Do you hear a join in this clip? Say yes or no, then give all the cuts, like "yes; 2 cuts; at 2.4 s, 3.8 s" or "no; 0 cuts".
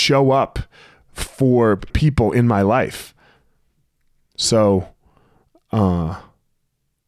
yes; 1 cut; at 1.9 s